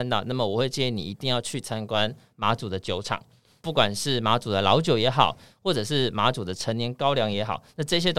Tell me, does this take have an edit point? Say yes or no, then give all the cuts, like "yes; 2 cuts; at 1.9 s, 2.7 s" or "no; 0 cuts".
no; 0 cuts